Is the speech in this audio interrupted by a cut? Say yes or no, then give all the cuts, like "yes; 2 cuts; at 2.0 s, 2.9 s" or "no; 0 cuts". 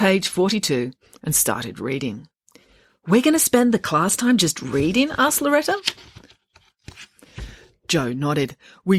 no; 0 cuts